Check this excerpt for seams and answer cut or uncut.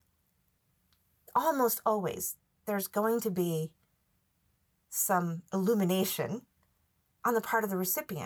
uncut